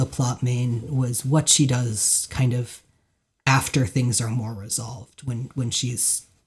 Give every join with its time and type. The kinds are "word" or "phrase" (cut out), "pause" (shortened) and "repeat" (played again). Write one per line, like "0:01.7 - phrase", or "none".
none